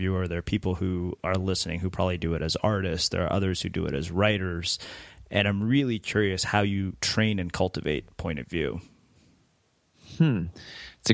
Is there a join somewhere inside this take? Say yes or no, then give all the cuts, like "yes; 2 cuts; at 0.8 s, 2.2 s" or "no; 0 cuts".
no; 0 cuts